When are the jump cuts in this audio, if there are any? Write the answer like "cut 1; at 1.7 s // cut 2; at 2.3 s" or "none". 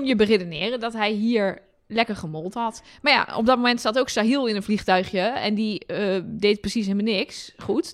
none